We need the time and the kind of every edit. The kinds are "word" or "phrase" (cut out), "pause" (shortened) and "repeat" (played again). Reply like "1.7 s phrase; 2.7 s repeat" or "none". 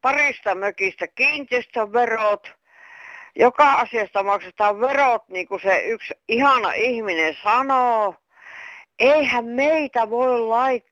none

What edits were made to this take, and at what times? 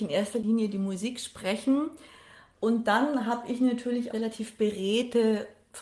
4.1 s word

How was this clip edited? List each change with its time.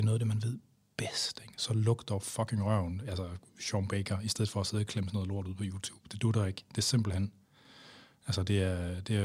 none

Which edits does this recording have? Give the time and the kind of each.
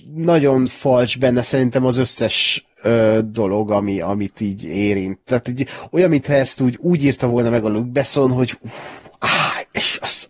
none

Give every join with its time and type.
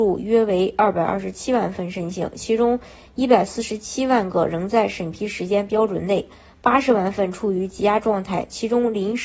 none

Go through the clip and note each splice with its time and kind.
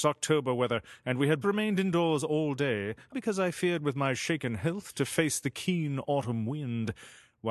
1.4 s word; 3.1 s word

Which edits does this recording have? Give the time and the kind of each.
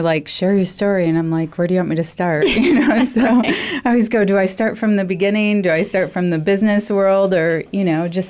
none

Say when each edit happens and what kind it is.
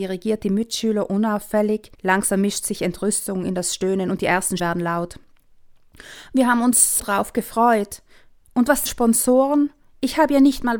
1.9 s pause; 4.6 s word; 7.0 s word; 8.9 s phrase

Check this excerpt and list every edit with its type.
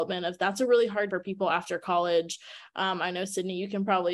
1.1 s word

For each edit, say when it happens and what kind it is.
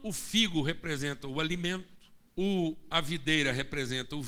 2.3 s pause

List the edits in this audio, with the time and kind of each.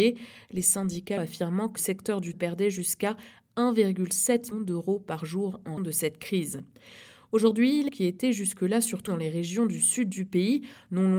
1.2 s word; 1.8 s word; 2.3 s word; 4.5 s word; 5.8 s word; 7.9 s word; 9.1 s word

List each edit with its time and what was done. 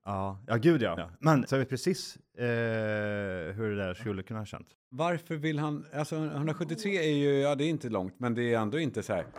1.0 s word; 1.5 s word

